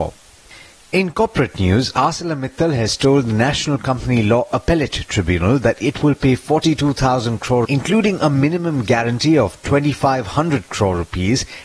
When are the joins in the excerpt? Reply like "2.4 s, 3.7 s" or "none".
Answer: 7.6 s